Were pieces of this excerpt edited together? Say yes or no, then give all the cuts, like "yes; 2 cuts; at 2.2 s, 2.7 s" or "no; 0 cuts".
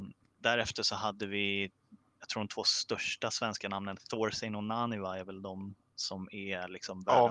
yes; 1 cut; at 5.8 s